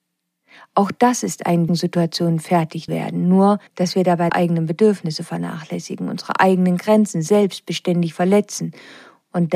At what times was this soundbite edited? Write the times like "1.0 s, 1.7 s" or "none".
1.7 s, 2.9 s, 3.7 s, 4.3 s